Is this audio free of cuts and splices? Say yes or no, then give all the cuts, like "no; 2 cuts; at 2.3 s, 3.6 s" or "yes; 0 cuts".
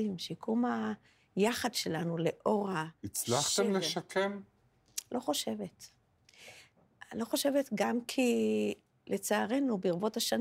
yes; 0 cuts